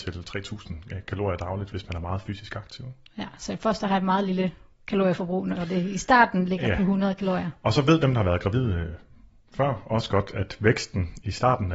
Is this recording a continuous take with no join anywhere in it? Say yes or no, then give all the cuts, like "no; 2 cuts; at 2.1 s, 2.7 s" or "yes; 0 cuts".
yes; 0 cuts